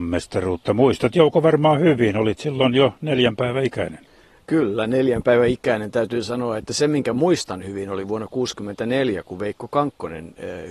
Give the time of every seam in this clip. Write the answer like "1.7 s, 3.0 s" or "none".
none